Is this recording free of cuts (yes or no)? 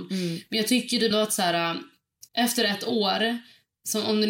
no